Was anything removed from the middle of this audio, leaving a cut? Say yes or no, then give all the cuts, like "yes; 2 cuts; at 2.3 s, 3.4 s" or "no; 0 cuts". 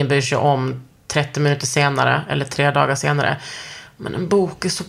no; 0 cuts